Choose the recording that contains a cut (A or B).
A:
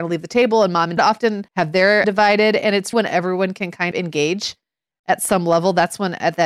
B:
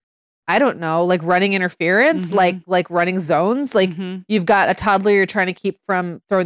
A